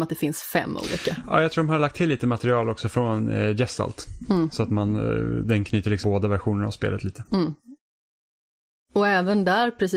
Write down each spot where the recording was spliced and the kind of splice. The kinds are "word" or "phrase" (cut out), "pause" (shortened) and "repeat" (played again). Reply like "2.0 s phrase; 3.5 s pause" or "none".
6.0 s word